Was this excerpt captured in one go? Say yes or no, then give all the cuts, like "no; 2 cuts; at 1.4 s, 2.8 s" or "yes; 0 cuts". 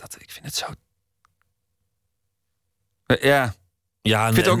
yes; 0 cuts